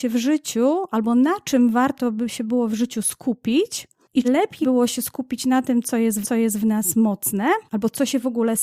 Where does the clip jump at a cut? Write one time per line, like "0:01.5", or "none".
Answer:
0:04.2
0:04.6
0:06.2
0:07.7